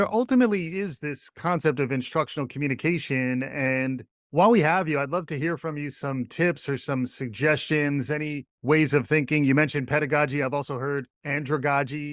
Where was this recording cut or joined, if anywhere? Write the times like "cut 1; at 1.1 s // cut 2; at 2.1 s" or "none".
cut 1; at 4.1 s // cut 2; at 8.5 s // cut 3; at 11.1 s